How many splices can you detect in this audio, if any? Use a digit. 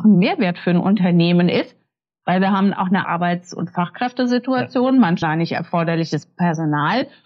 2